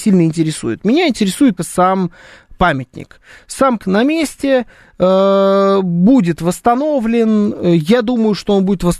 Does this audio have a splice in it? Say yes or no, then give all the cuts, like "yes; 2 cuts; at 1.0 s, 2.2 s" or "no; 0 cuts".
yes; 2 cuts; at 1.6 s, 3.8 s